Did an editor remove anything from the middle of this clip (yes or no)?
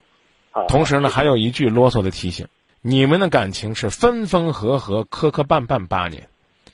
yes